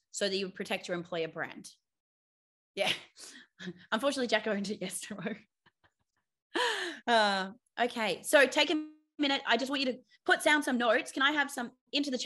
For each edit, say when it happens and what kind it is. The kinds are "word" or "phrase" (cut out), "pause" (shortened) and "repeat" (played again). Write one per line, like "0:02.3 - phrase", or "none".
none